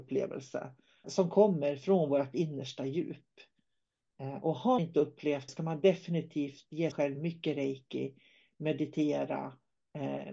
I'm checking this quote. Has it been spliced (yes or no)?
yes